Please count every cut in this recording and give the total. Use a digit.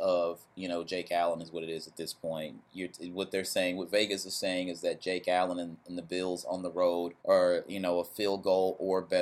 1